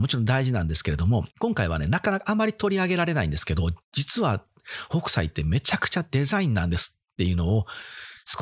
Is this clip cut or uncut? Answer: cut